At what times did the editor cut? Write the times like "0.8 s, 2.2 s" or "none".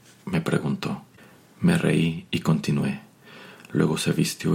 none